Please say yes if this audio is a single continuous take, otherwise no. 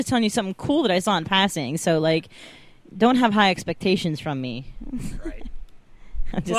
yes